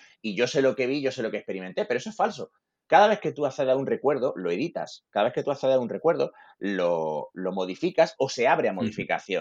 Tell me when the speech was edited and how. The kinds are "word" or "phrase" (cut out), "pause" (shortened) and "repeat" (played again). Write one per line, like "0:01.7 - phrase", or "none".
none